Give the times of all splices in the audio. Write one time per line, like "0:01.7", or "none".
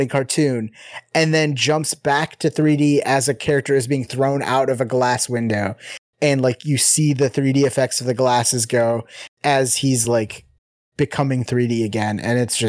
none